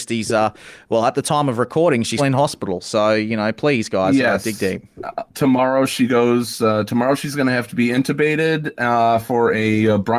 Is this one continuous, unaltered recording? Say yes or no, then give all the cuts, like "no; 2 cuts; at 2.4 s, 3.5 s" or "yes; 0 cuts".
no; 1 cut; at 2.2 s